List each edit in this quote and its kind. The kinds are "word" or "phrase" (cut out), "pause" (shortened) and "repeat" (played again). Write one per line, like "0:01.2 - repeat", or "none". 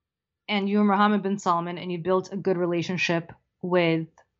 none